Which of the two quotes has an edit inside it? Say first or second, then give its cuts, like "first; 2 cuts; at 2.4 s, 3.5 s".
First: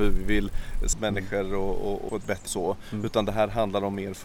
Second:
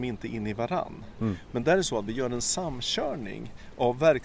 first; 3 cuts; at 0.9 s, 2.1 s, 2.5 s